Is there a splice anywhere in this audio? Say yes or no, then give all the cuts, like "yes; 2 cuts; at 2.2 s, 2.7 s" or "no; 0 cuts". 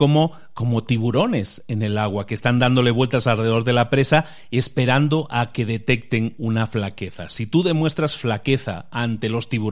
no; 0 cuts